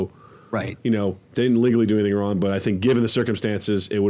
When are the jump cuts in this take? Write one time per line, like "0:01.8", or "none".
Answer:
0:01.2